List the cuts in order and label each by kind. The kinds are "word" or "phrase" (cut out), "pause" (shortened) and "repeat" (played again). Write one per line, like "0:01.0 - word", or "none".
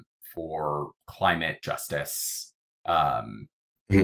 0:01.0 - pause